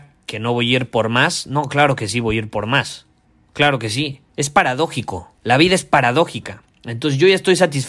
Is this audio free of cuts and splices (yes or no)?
no